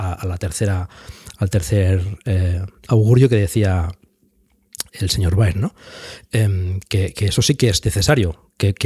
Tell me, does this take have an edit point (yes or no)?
yes